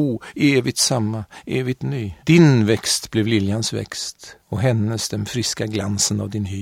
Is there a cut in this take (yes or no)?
yes